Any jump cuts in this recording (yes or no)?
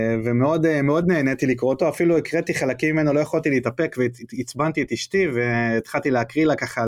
no